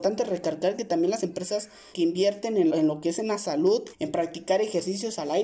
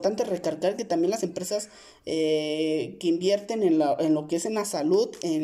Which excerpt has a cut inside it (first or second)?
first